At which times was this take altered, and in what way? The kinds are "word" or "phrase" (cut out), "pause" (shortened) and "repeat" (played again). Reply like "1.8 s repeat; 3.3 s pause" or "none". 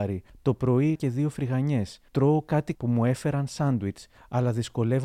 0.9 s word; 2.7 s word